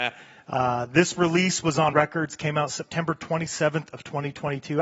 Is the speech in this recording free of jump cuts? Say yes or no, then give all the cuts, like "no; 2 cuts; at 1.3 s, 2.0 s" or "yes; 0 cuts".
no; 1 cut; at 1.9 s